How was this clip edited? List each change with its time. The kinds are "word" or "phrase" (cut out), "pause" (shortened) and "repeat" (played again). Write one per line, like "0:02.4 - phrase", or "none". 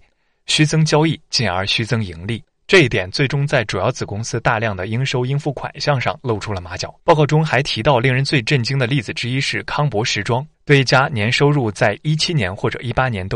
0:07.0 - pause
0:10.5 - pause